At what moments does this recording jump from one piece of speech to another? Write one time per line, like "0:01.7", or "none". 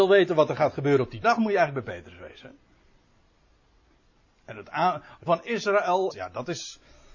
0:01.2
0:05.3
0:06.1